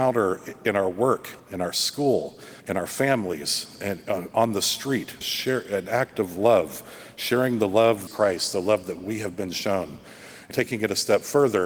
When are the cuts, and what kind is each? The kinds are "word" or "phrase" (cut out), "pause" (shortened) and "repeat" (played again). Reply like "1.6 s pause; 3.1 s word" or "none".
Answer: 1.4 s pause; 2.6 s pause; 5.2 s word; 8.1 s phrase; 10.5 s word